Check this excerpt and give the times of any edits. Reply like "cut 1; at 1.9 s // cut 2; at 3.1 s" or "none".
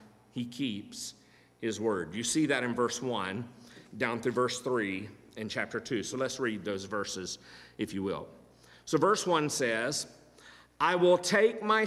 none